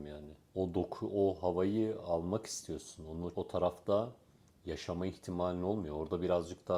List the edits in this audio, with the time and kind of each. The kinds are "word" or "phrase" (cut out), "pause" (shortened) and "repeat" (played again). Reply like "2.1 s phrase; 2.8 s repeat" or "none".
3.3 s word